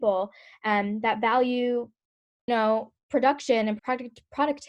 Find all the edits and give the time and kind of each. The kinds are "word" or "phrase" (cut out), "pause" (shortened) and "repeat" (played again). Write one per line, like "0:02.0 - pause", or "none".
0:02.5 - word
0:03.0 - pause
0:03.8 - word